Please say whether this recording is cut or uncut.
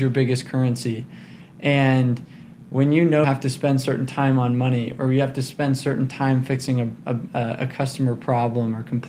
cut